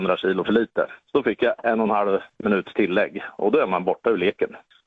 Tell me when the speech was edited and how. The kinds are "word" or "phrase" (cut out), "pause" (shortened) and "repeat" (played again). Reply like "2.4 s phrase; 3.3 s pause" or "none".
none